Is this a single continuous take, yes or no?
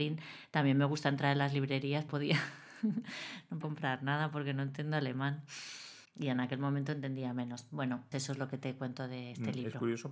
no